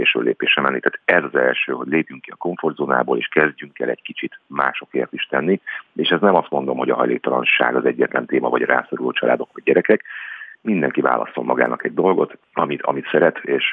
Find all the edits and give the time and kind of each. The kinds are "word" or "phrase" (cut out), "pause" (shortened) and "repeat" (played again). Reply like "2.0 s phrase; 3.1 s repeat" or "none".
10.5 s pause; 12.4 s pause